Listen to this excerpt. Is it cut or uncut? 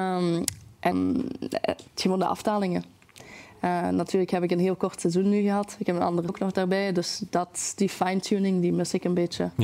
cut